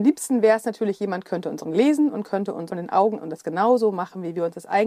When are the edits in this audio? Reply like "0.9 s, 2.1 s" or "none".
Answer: 1.6 s, 2.7 s, 3.2 s